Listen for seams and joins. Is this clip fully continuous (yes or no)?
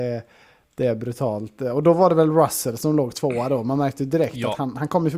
yes